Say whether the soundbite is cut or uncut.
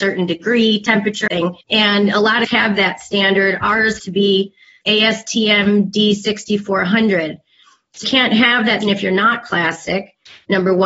cut